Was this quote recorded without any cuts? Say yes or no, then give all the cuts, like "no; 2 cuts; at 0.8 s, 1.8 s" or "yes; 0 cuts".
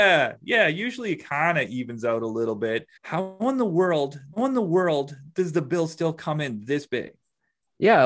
no; 2 cuts; at 3.0 s, 4.3 s